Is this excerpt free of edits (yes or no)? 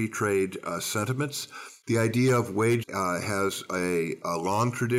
no